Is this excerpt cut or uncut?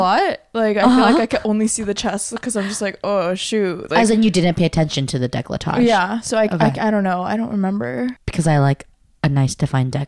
uncut